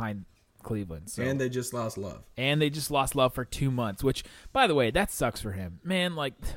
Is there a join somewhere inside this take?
yes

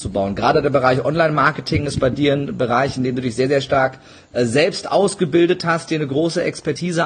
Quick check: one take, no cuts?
yes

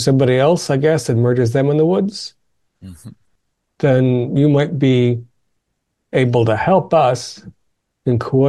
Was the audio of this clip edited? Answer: no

